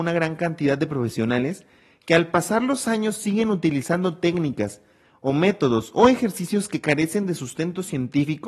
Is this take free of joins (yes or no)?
yes